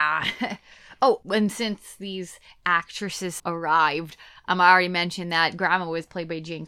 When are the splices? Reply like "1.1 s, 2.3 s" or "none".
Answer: 3.4 s